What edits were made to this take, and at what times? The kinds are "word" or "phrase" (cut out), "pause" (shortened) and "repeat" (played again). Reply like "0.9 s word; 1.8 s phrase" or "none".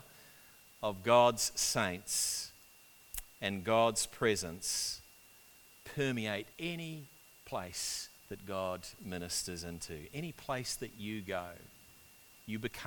6.5 s pause; 8.2 s pause